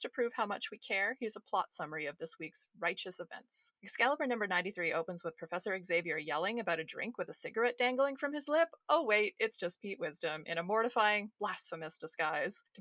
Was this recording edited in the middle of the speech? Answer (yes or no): no